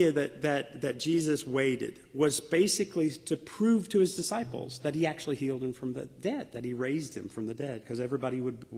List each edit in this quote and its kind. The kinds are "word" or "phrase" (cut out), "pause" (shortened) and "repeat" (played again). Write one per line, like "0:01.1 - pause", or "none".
none

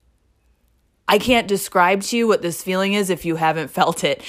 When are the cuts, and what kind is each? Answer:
none

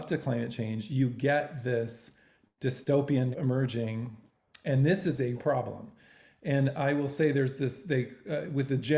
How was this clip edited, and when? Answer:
0:03.3 - word
0:05.4 - word

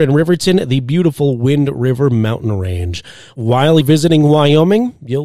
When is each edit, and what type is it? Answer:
0:03.8 - word

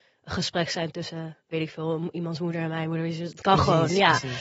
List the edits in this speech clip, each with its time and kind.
0:01.4 - pause

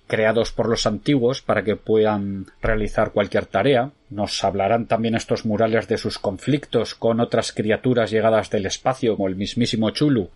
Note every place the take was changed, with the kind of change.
0:02.5 - pause
0:04.0 - pause
0:09.2 - word

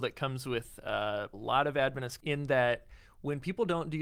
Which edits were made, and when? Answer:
0:01.3 - word
0:02.2 - word

